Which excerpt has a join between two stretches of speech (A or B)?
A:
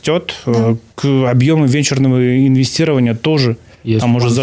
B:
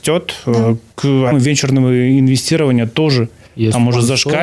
B